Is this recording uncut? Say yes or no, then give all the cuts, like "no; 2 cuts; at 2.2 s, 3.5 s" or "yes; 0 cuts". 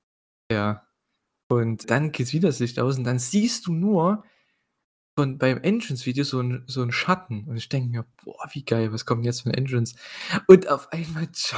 no; 1 cut; at 1.8 s